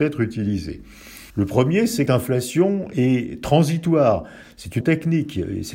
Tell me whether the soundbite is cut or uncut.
cut